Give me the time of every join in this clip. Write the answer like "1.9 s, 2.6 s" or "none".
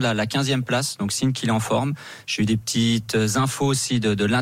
none